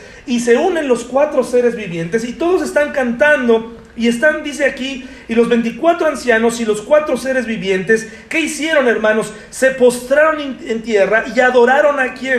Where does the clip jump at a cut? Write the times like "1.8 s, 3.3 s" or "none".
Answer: none